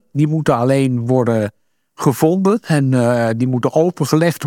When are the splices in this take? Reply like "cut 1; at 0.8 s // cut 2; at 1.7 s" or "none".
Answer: none